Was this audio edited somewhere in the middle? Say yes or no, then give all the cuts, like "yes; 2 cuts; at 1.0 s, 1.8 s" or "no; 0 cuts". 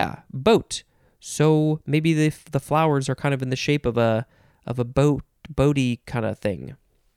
no; 0 cuts